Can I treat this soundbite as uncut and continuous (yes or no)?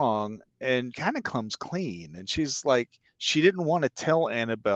no